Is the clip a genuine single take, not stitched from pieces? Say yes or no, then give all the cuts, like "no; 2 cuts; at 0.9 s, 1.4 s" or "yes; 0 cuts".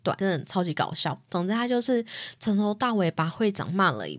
yes; 0 cuts